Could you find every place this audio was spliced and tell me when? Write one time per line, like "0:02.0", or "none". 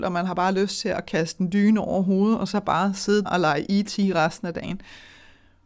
0:03.2